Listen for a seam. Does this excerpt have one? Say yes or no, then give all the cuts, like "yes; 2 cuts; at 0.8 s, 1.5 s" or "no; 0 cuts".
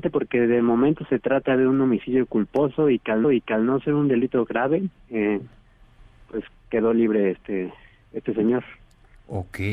yes; 1 cut; at 3.2 s